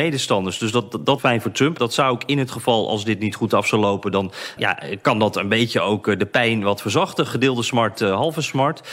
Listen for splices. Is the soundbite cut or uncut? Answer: cut